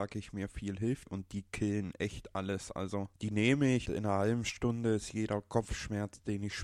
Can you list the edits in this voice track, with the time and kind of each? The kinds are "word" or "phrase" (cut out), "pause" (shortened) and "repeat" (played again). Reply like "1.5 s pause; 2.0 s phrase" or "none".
1.1 s word; 3.8 s word